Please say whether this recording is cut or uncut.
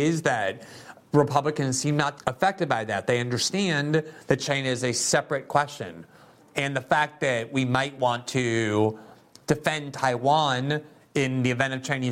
cut